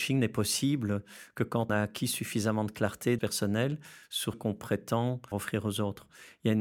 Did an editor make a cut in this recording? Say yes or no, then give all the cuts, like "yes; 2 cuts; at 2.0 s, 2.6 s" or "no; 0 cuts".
yes; 4 cuts; at 1.7 s, 3.2 s, 4.3 s, 5.3 s